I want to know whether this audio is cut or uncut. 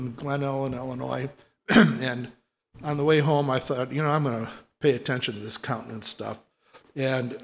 uncut